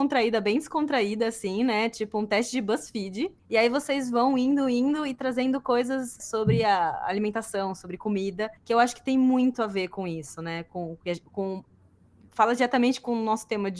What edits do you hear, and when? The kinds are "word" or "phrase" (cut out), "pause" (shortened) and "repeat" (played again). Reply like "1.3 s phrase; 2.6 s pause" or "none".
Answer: 3.4 s pause; 8.6 s pause